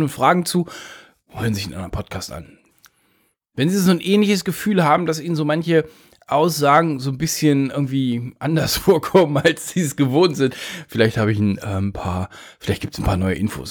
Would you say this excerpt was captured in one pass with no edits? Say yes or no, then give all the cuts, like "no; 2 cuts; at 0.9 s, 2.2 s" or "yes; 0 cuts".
yes; 0 cuts